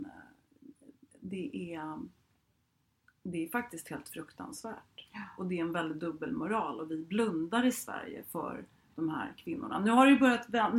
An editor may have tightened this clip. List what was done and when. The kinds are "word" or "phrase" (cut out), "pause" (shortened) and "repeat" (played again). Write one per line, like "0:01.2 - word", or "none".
none